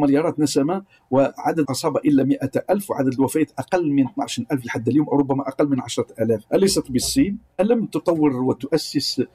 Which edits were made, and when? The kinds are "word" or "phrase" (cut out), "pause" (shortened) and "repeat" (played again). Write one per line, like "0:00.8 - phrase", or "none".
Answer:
0:01.6 - word